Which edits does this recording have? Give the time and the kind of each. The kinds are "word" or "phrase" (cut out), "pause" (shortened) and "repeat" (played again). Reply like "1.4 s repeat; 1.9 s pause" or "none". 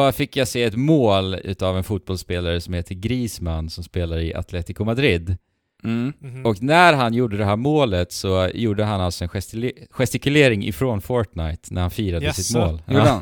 none

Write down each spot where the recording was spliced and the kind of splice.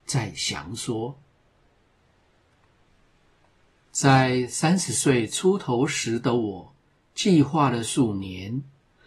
none

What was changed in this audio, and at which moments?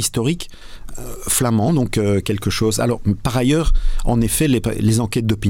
none

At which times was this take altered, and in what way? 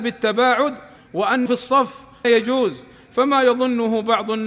1.0 s word; 1.5 s word; 2.2 s word

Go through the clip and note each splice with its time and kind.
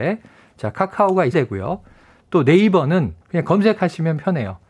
1.3 s phrase; 3.2 s pause

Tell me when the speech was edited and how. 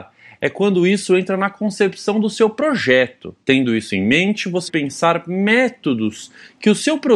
3.4 s pause; 4.7 s word

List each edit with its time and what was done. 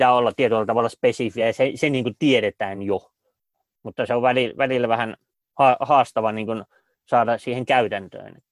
none

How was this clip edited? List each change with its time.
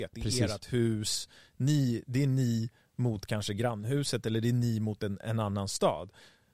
none

